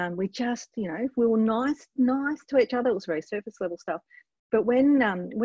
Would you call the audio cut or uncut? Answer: uncut